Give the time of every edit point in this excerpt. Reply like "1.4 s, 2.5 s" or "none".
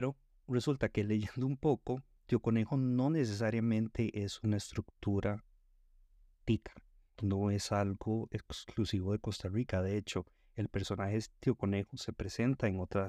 none